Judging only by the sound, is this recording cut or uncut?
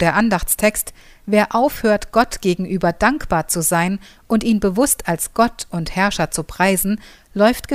uncut